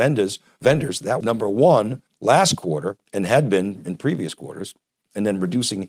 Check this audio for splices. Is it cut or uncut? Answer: cut